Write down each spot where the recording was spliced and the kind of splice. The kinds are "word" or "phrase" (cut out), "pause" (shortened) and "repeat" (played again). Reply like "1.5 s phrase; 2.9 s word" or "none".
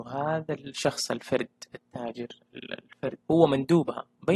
3.2 s pause